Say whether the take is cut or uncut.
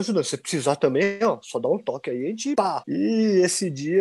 uncut